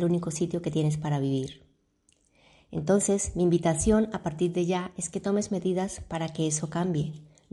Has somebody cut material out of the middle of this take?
no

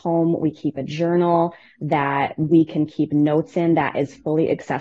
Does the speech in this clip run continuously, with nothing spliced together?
yes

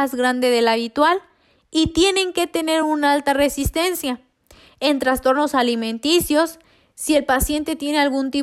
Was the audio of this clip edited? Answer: no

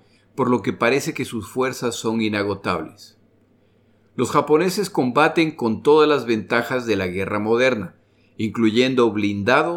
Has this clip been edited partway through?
no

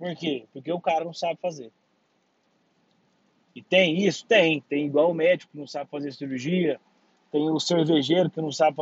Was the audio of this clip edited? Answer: no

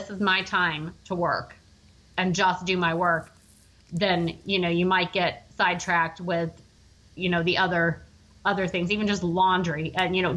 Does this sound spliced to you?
no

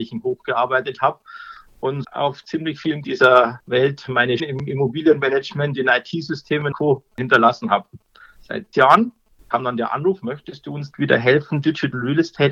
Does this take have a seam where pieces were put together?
yes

